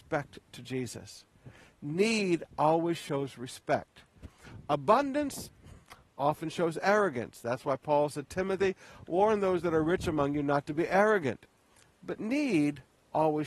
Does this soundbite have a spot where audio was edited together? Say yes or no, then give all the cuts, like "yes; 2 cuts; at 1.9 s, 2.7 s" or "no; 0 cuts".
no; 0 cuts